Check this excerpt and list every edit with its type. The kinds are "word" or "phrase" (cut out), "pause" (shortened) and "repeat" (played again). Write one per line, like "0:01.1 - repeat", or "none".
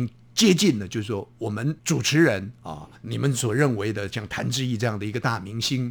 0:01.8 - pause
0:02.9 - pause